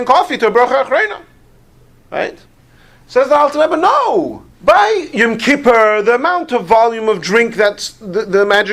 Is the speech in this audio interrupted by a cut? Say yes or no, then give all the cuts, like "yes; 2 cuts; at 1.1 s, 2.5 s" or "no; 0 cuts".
yes; 2 cuts; at 1.9 s, 4.5 s